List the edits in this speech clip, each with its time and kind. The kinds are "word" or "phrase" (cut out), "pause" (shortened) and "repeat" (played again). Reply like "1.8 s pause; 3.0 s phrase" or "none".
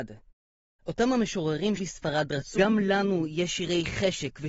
1.8 s word; 2.6 s word